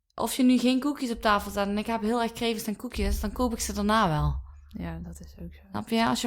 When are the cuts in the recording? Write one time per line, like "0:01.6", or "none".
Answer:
none